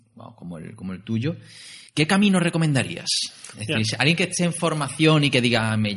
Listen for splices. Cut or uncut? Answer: cut